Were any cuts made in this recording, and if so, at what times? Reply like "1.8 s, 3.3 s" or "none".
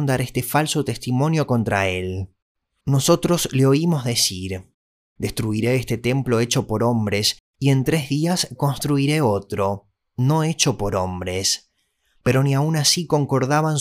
none